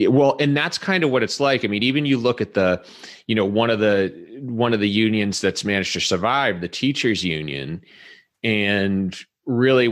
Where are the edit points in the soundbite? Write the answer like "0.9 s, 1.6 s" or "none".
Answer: none